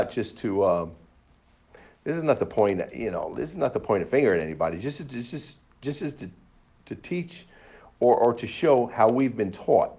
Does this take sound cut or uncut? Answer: uncut